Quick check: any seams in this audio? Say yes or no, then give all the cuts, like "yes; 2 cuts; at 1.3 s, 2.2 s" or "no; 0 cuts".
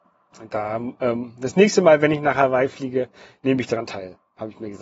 no; 0 cuts